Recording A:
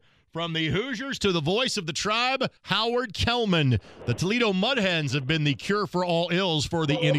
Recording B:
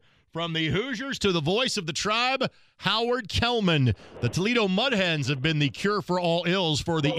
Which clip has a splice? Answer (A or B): A